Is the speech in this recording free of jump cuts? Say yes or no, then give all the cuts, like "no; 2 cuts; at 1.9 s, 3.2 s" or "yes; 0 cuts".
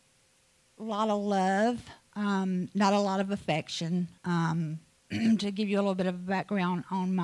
no; 1 cut; at 4.2 s